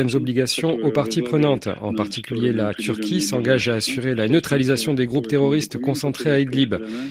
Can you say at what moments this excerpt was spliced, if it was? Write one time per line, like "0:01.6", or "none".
none